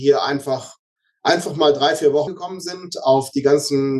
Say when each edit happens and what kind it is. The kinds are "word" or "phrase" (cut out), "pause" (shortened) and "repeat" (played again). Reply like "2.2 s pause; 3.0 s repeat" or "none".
2.3 s phrase